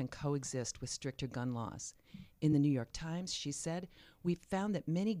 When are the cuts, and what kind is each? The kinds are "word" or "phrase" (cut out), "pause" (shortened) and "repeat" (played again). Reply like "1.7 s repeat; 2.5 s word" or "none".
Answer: none